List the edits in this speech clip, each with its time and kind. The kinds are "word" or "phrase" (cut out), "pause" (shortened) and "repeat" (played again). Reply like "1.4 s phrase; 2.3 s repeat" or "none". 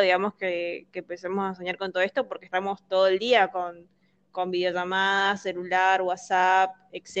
none